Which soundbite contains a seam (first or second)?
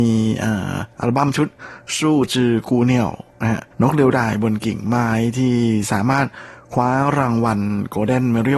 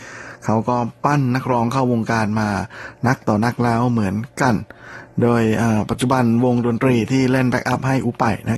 first